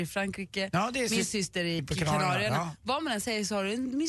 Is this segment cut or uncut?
cut